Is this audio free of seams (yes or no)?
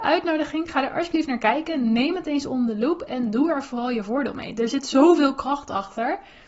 yes